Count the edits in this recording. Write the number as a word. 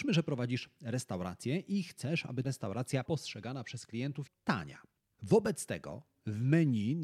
three